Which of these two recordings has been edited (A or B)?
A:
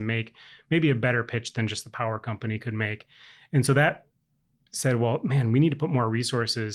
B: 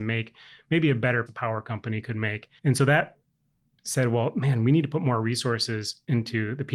B